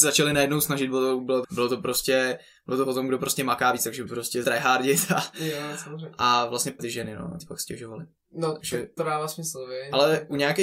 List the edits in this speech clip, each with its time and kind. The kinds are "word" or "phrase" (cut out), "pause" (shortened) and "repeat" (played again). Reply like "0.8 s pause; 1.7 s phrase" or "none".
1.4 s word; 4.1 s word; 4.4 s word; 6.8 s word; 7.4 s word; 9.0 s word